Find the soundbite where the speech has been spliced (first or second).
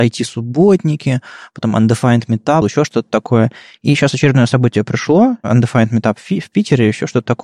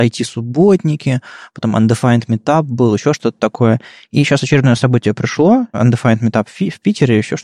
first